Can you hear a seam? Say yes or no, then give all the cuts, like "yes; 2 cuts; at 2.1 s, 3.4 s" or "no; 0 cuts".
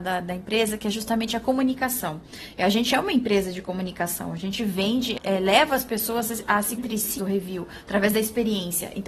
yes; 3 cuts; at 5.2 s, 6.8 s, 7.2 s